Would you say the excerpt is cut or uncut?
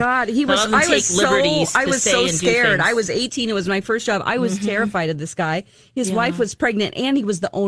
uncut